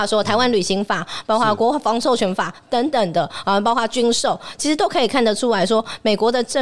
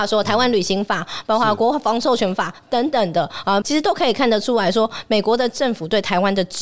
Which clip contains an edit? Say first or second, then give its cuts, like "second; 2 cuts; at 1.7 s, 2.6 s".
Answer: second; 1 cut; at 3.6 s